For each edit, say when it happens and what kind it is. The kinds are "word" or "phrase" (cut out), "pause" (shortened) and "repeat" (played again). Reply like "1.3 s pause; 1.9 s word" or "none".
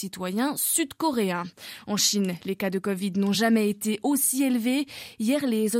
none